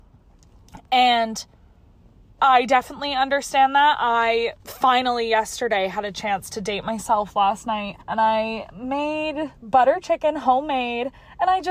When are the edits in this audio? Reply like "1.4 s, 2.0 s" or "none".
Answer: 4.6 s, 8.0 s